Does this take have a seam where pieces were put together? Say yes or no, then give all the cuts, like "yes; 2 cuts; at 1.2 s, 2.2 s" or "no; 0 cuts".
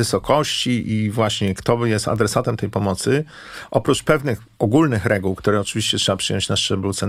yes; 1 cut; at 4.5 s